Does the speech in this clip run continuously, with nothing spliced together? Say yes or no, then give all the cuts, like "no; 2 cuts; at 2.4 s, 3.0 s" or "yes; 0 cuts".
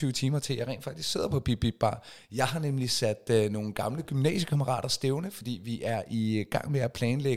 yes; 0 cuts